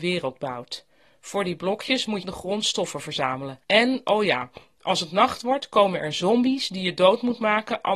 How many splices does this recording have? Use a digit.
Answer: 2